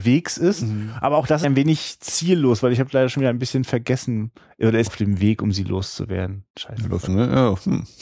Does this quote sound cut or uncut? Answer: cut